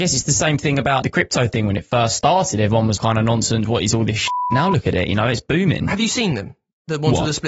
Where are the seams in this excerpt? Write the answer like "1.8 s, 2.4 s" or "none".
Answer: 1.0 s, 3.0 s